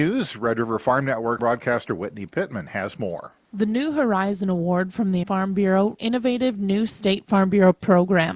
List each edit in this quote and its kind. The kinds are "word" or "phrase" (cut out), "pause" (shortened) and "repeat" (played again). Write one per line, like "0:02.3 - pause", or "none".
0:01.4 - word
0:05.2 - word
0:06.0 - word